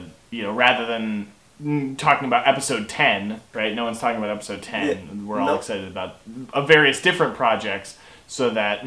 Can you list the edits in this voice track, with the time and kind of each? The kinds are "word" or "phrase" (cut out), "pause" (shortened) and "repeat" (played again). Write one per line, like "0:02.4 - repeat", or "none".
0:03.5 - pause